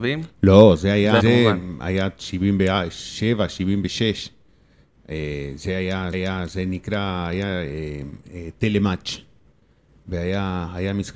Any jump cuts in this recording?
yes; 2 cuts; at 1.2 s, 6.1 s

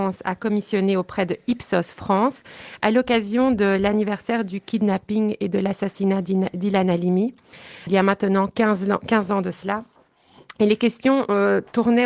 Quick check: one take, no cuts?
no; 1 cut; at 7.9 s

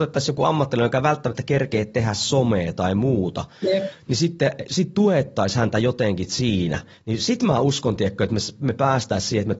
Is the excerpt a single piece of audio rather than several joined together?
yes; 0 cuts

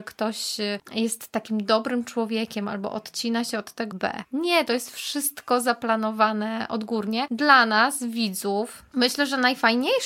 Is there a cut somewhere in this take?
yes; 1 cut; at 3.9 s

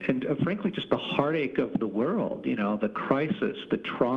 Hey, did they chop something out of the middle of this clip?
no; 0 cuts

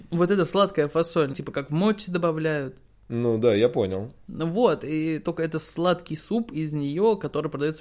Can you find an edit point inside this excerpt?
yes; 1 cut; at 1.3 s

